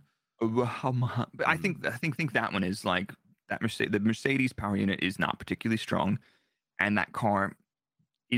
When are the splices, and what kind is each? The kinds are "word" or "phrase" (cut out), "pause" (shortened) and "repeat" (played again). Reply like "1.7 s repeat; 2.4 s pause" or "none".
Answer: 2.2 s repeat